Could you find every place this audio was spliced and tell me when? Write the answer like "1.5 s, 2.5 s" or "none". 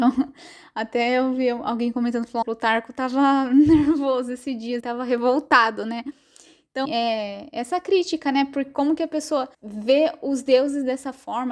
2.4 s, 4.8 s, 6.8 s, 9.5 s